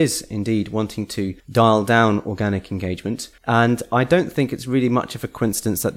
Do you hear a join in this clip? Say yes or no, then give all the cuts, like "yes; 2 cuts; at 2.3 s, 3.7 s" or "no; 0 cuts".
yes; 2 cuts; at 1.4 s, 3.4 s